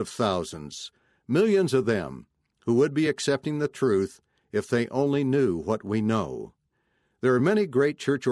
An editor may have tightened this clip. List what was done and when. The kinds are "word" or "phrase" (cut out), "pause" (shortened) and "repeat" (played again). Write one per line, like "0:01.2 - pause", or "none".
none